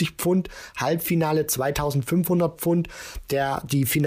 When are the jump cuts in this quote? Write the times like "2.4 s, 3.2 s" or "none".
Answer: none